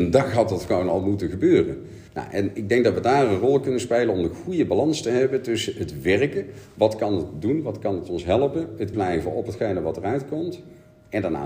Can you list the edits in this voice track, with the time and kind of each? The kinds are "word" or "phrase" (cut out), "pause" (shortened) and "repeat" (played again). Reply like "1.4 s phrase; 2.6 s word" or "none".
2.1 s pause; 8.9 s word